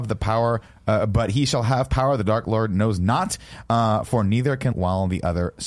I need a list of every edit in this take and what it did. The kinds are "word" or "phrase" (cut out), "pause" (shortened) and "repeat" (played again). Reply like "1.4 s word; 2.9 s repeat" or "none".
4.7 s word